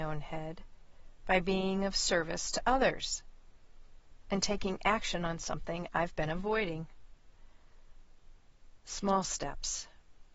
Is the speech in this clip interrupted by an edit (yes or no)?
no